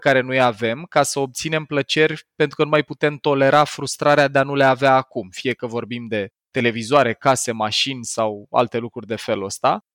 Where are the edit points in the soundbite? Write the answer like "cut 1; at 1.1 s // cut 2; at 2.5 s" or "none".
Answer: cut 1; at 6.4 s